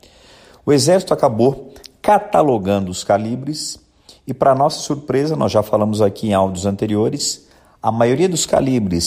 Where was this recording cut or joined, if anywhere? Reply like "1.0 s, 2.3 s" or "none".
none

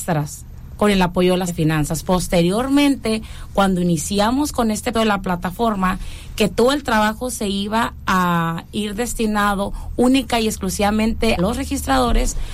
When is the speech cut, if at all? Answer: 1.5 s, 4.9 s, 11.4 s

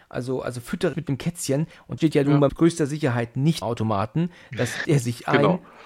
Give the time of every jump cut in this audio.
0.9 s, 2.0 s, 2.5 s, 3.6 s, 4.8 s

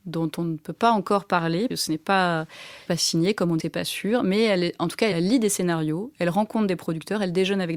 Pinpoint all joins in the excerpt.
1.7 s, 2.9 s, 3.6 s, 5.1 s

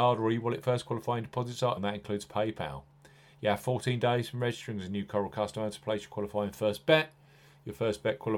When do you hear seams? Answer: 1.8 s

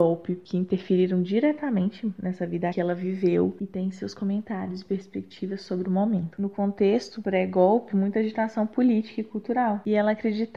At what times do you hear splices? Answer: 2.7 s, 7.9 s

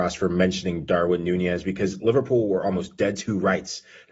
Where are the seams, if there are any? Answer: none

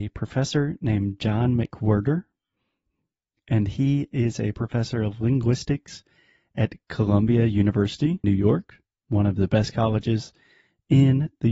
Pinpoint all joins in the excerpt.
8.2 s

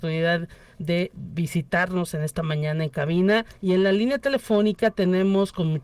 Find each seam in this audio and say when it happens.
3.5 s

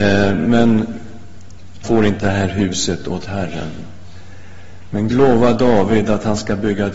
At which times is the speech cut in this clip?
1.8 s, 2.2 s, 5.1 s

